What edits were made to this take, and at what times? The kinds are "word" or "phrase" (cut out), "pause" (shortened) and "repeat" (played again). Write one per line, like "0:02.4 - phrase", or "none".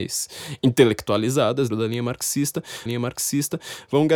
0:01.7 - word
0:02.9 - repeat